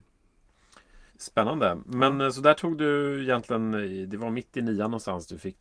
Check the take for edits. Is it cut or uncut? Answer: cut